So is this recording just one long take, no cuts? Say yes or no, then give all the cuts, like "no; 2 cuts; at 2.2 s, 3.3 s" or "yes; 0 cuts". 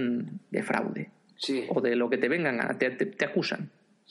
yes; 0 cuts